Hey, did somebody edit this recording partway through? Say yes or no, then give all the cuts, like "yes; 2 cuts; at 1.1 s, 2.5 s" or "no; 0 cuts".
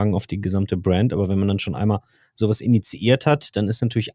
no; 0 cuts